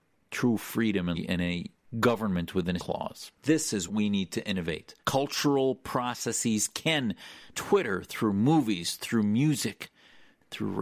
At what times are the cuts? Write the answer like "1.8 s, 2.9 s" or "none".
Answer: 1.1 s, 2.8 s, 3.3 s, 3.9 s, 5.0 s, 7.5 s